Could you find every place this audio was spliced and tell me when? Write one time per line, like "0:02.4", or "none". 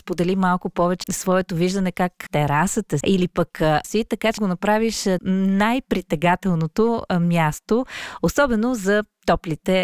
0:01.0
0:02.3
0:03.0
0:03.8
0:04.4
0:05.2